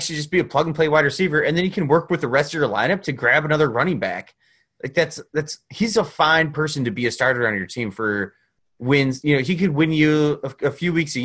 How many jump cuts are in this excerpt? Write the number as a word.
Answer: zero